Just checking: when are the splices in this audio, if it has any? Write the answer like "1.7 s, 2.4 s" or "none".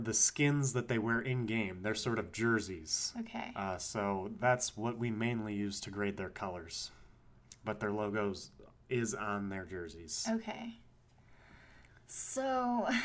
none